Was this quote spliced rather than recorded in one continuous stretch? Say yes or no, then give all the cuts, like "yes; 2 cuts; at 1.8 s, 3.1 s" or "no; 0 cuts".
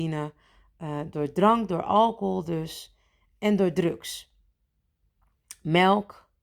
no; 0 cuts